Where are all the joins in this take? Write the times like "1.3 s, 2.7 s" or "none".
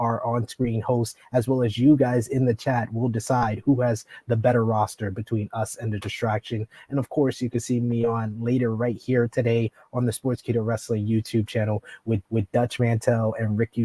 12.3 s